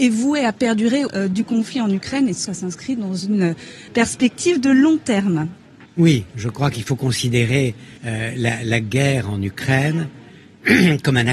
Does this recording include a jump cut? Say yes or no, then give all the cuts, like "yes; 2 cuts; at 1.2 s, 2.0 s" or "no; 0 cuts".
yes; 5 cuts; at 1.1 s, 2.5 s, 3.9 s, 5.9 s, 8.0 s